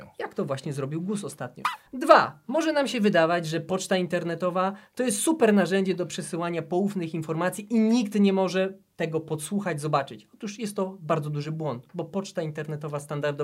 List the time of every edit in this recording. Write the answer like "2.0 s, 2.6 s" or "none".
1.9 s